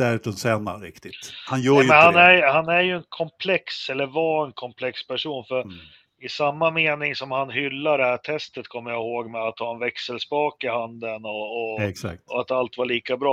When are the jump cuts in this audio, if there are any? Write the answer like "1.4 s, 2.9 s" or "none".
none